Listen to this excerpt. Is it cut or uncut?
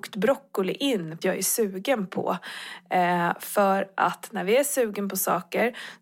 cut